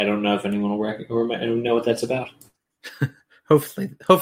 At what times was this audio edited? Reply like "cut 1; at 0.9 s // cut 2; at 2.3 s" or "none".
none